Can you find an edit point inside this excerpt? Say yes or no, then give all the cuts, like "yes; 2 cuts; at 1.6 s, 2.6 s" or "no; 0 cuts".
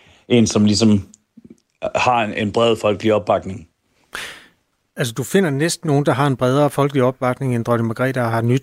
yes; 1 cut; at 5.8 s